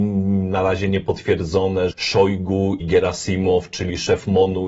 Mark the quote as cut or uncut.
cut